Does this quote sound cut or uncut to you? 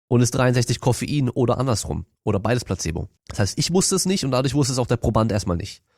cut